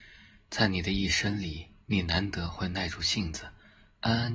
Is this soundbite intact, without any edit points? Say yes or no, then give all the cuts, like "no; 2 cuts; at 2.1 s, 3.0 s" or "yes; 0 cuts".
no; 1 cut; at 1.8 s